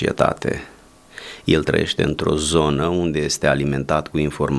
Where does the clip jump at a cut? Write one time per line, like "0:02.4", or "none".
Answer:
none